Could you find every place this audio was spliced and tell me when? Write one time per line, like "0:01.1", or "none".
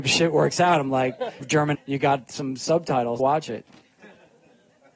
0:01.4
0:01.7
0:03.2